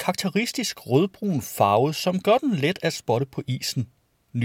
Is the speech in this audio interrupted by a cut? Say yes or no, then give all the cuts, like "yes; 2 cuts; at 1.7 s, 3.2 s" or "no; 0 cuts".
no; 0 cuts